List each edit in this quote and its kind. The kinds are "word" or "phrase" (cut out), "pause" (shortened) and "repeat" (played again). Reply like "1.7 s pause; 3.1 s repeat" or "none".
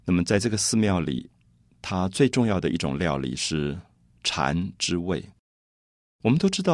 none